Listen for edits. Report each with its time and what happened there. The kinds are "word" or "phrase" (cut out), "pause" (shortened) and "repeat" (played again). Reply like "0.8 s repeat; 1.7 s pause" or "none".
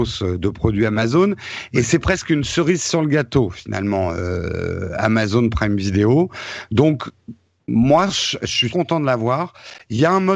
8.7 s word